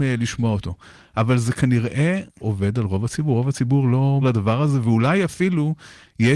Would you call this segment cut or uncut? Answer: cut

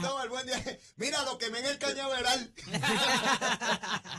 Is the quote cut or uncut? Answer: uncut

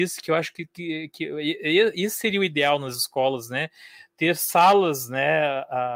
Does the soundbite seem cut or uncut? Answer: uncut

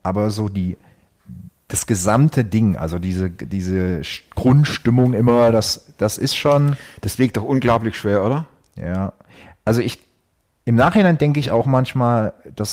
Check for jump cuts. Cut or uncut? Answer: uncut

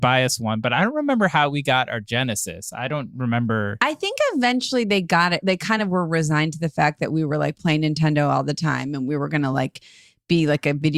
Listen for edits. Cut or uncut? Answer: uncut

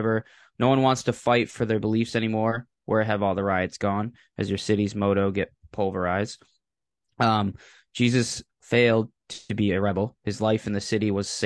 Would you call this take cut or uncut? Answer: uncut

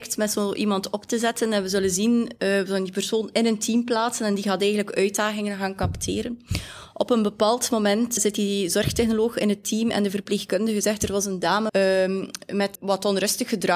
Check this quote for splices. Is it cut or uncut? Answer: cut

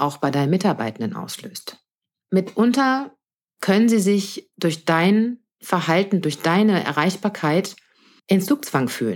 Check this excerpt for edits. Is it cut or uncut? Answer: uncut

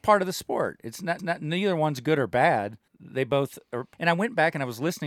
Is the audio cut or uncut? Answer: cut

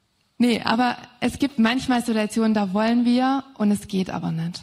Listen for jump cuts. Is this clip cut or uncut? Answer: uncut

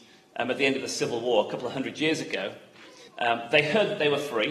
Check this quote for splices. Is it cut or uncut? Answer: cut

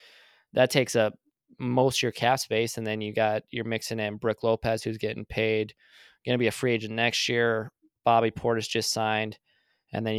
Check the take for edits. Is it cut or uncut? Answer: uncut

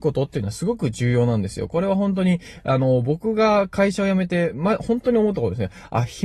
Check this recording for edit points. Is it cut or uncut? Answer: uncut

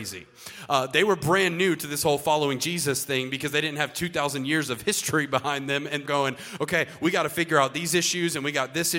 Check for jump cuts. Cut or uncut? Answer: cut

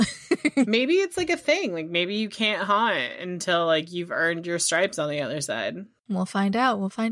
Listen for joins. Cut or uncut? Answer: uncut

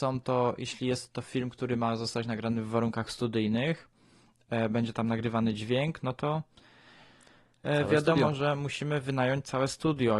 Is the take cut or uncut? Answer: uncut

